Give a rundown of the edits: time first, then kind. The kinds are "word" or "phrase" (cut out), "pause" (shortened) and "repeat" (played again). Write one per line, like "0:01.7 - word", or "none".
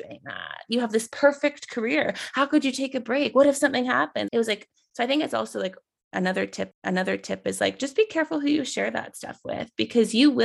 0:04.3 - phrase
0:06.7 - repeat